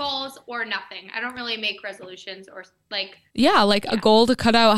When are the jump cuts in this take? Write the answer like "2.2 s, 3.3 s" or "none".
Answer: 3.3 s